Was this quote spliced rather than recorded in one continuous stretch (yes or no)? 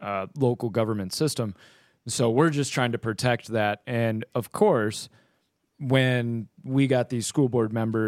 no